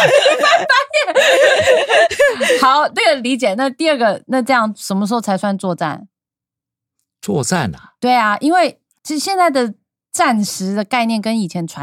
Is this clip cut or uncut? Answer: uncut